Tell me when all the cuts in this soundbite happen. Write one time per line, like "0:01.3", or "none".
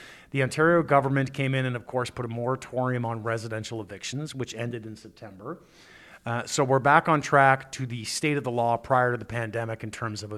none